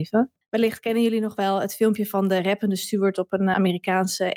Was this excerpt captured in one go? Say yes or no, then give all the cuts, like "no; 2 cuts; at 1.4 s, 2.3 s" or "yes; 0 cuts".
yes; 0 cuts